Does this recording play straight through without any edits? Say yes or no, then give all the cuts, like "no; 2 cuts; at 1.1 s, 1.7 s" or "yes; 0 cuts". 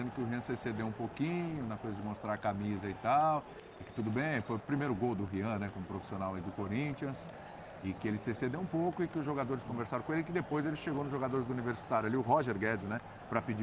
no; 1 cut; at 4.6 s